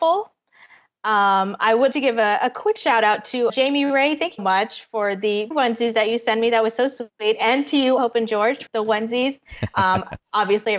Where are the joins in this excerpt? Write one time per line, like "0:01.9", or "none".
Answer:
0:01.9
0:03.5
0:04.4
0:05.5
0:08.0
0:08.7